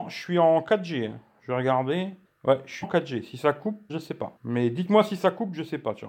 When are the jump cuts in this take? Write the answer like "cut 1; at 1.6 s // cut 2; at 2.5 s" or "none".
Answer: cut 1; at 2.3 s // cut 2; at 2.8 s // cut 3; at 3.9 s // cut 4; at 4.4 s